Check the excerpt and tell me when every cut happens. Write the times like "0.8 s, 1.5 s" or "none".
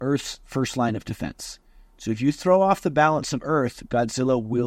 none